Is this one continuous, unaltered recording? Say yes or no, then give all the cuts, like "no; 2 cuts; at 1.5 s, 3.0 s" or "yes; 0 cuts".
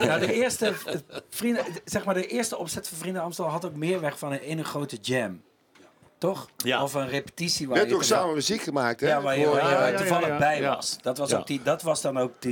yes; 0 cuts